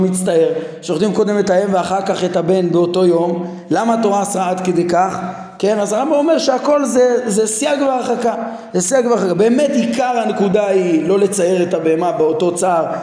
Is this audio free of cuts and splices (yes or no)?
yes